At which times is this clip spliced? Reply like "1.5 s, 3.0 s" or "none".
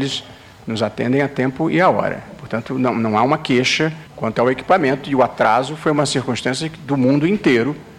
4.1 s